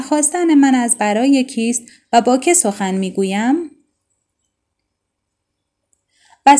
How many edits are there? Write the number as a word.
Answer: zero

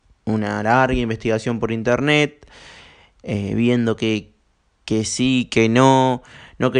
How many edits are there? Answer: zero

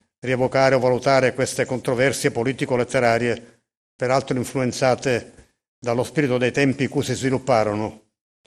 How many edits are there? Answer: zero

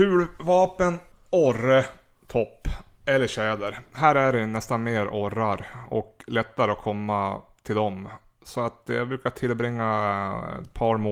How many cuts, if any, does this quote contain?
one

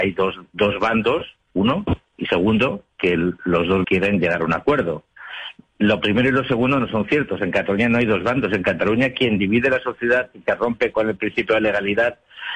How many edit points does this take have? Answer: one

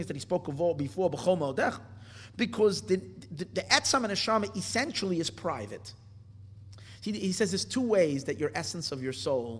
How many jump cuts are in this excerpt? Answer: zero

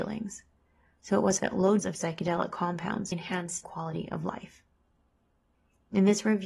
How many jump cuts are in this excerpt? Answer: four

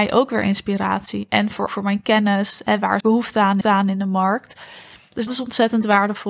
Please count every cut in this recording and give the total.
four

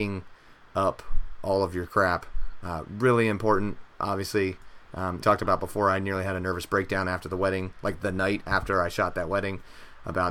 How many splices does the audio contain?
two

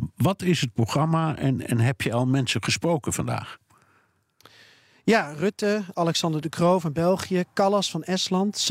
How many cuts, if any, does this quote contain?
zero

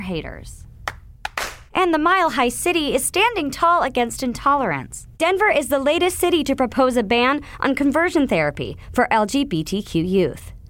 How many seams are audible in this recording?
one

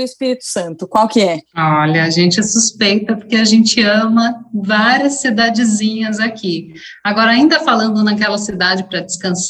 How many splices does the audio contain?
one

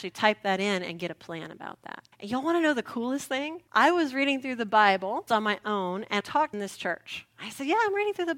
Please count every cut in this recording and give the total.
five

